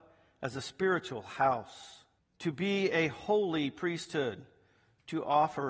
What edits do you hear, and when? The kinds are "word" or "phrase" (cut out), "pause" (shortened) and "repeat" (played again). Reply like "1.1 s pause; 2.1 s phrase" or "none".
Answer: 2.2 s pause